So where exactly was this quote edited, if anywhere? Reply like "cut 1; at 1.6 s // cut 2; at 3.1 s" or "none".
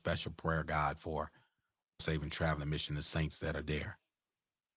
cut 1; at 2.0 s